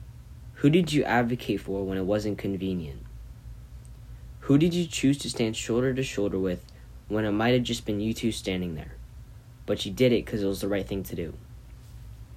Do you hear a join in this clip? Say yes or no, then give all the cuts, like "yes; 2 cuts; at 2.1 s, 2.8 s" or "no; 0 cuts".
no; 0 cuts